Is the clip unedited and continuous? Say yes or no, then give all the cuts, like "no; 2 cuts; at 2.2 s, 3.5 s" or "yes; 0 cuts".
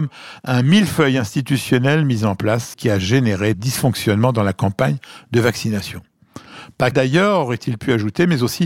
no; 3 cuts; at 2.7 s, 3.5 s, 6.9 s